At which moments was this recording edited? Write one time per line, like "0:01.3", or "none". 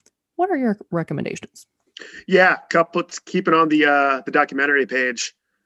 none